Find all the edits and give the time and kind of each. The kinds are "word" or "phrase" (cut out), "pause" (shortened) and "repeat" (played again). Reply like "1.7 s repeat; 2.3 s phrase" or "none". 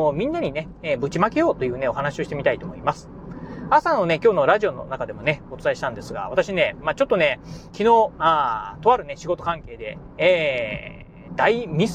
7.7 s phrase